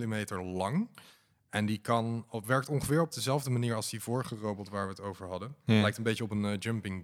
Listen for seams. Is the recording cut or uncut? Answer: uncut